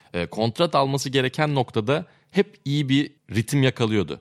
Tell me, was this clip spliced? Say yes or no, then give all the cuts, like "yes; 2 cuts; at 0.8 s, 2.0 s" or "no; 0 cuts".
yes; 1 cut; at 3.2 s